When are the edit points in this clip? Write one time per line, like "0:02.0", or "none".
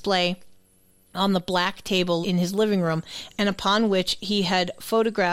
0:02.2

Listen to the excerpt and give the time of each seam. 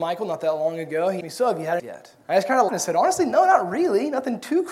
0:01.2
0:01.8
0:02.2
0:02.7

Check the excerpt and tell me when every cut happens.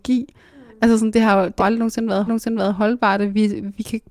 0:01.6
0:02.3

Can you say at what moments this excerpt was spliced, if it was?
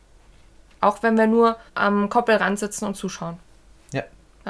0:01.7

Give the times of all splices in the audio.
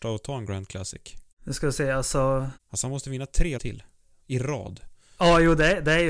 0:01.3
0:02.6
0:03.6

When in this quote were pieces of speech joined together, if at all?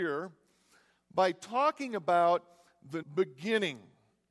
0:03.0

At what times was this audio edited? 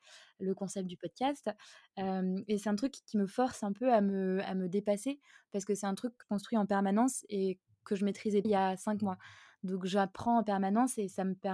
0:06.2
0:08.4

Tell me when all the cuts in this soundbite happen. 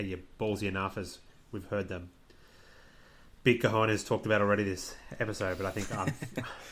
none

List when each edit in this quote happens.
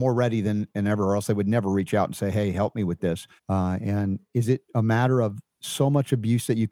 0:03.4
0:05.5

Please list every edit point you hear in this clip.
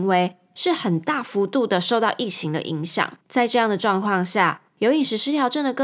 0:03.2
0:04.7

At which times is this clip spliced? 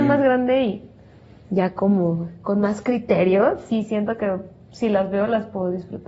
none

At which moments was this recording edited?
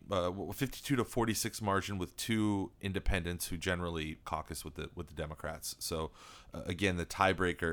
0:04.2

